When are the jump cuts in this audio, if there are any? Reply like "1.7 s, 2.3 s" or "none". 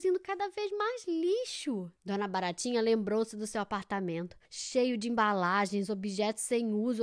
2.0 s, 4.4 s